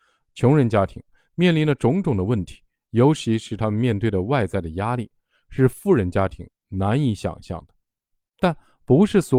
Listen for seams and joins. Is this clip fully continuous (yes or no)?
yes